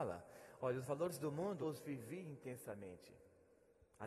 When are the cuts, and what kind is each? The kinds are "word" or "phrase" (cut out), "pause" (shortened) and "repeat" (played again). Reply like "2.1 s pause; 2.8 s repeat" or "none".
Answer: 1.6 s word